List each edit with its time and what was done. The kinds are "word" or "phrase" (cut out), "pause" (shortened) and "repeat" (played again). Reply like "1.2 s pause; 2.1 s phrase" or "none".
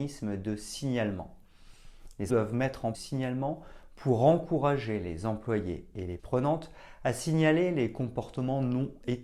2.3 s word; 2.9 s phrase; 6.2 s word